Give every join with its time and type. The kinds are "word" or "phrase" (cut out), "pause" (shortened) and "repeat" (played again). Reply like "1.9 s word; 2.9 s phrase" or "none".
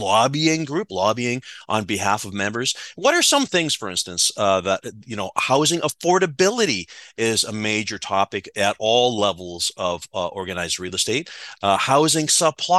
none